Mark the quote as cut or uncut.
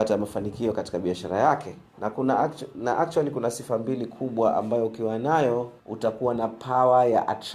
cut